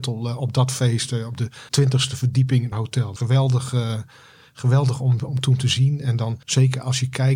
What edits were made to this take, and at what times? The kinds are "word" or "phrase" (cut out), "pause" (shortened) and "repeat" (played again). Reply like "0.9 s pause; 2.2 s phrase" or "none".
1.7 s pause; 2.7 s phrase; 3.2 s word; 5.3 s word; 6.4 s pause